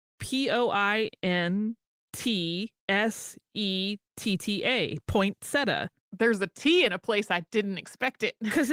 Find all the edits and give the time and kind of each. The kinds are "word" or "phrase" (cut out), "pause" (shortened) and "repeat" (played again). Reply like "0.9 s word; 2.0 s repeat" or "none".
2.8 s pause; 6.0 s pause

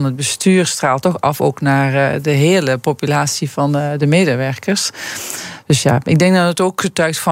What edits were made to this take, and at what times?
none

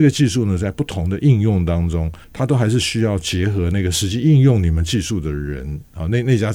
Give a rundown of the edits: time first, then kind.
2.2 s pause

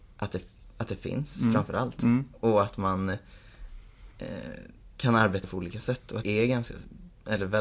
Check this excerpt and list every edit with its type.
4.1 s pause; 5.4 s word; 6.2 s word

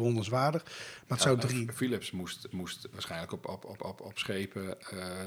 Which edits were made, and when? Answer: 2.5 s repeat; 3.8 s repeat

